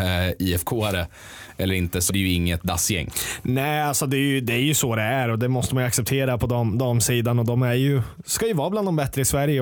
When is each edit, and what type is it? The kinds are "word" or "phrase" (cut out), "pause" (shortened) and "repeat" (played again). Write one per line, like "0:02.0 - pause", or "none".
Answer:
0:02.1 - word